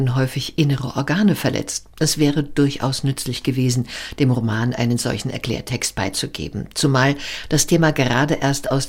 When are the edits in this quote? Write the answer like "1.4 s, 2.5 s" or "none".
1.9 s